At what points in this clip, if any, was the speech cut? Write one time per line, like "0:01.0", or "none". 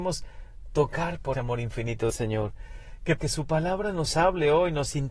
0:01.3
0:02.1
0:03.2